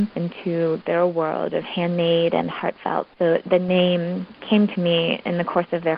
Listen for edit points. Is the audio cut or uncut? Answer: cut